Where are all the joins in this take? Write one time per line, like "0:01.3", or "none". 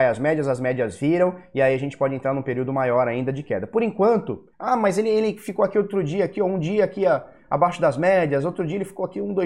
0:04.5